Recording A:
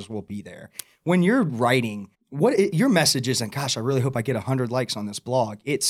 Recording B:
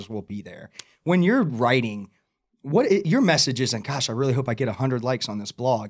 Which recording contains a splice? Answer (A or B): A